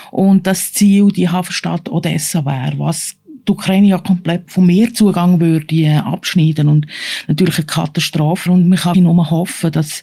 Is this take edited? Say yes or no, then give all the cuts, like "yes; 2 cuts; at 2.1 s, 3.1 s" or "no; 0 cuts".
yes; 3 cuts; at 4.5 s, 8.5 s, 8.9 s